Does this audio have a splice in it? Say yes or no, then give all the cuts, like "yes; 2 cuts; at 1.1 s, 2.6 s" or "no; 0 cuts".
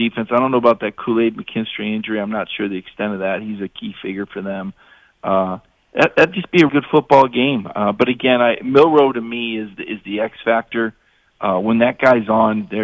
yes; 1 cut; at 6.7 s